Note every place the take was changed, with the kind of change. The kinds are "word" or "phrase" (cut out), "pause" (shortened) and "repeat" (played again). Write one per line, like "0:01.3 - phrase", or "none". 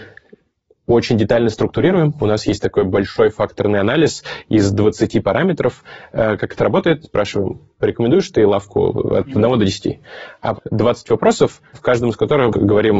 0:07.0 - word
0:10.5 - phrase